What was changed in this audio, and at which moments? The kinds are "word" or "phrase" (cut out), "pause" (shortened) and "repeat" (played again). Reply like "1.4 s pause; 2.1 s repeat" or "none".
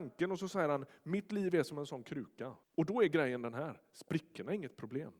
2.6 s pause